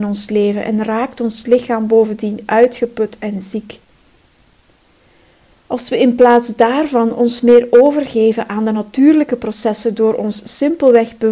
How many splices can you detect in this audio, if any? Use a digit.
0